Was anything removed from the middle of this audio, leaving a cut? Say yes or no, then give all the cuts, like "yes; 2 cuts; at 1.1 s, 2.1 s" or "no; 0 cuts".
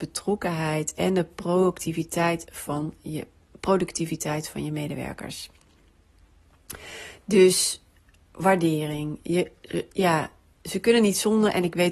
no; 0 cuts